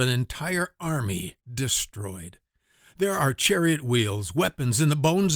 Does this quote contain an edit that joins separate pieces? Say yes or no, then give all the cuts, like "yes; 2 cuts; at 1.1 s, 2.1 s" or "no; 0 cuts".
yes; 1 cut; at 1.4 s